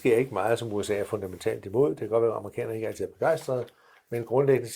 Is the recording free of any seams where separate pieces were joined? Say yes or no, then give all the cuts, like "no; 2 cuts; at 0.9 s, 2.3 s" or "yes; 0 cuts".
yes; 0 cuts